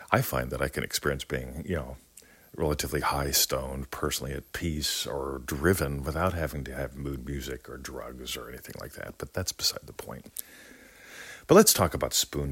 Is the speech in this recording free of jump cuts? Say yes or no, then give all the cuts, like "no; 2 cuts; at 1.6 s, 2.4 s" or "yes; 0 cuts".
yes; 0 cuts